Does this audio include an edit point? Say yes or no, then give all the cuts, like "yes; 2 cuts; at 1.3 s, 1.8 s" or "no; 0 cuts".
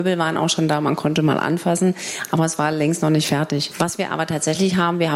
no; 0 cuts